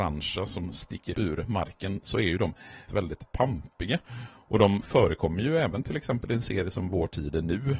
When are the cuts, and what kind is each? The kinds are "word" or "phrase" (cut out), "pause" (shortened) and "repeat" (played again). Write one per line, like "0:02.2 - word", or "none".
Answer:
0:01.1 - word
0:02.9 - word